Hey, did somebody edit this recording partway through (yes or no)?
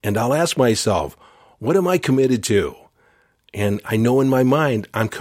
no